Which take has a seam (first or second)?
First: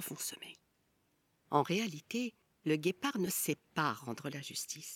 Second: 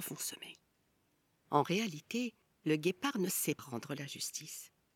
second